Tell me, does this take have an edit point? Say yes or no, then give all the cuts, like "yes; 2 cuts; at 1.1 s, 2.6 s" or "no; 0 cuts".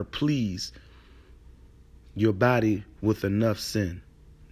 no; 0 cuts